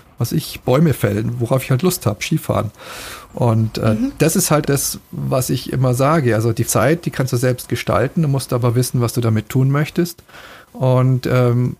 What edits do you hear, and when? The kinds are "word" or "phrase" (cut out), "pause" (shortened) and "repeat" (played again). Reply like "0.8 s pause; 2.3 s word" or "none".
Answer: 4.6 s word; 6.7 s word